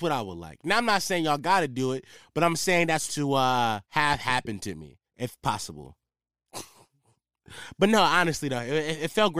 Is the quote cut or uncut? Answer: cut